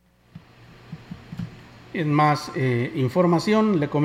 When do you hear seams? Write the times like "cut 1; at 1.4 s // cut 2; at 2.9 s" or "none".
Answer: cut 1; at 1.8 s